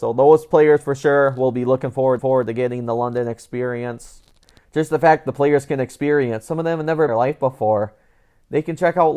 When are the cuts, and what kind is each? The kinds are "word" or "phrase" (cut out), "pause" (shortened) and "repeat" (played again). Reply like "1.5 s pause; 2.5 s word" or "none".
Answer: 2.2 s repeat; 4.4 s pause; 7.1 s phrase